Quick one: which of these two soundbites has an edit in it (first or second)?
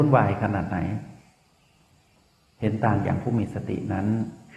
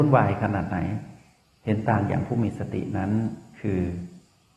second